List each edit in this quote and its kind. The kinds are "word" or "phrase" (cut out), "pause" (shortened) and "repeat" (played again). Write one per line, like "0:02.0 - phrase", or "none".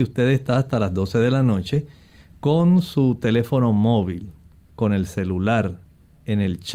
none